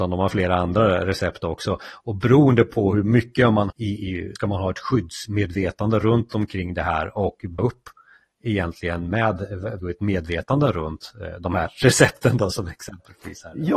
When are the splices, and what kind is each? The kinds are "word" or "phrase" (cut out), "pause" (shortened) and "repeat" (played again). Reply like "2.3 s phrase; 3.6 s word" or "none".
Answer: 3.7 s word; 4.4 s word; 7.6 s word; 9.8 s word